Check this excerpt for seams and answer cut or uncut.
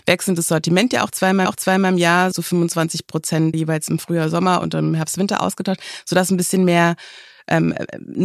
cut